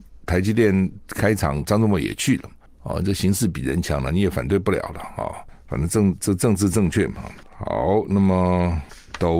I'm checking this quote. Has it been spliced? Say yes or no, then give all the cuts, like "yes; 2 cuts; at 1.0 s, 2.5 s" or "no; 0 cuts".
no; 0 cuts